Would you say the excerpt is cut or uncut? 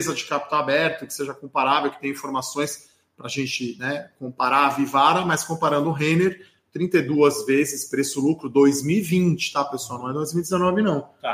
uncut